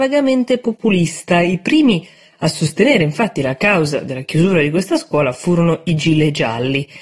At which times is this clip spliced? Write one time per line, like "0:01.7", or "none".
none